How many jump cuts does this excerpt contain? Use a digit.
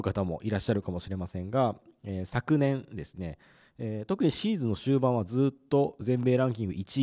0